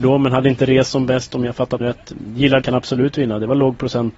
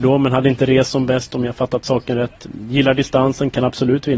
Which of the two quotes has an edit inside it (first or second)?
first